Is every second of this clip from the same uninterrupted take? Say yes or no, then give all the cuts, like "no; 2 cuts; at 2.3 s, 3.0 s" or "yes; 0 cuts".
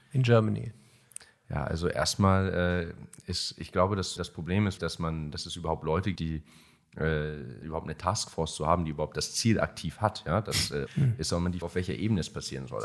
no; 6 cuts; at 4.2 s, 4.8 s, 6.1 s, 7.6 s, 10.9 s, 11.6 s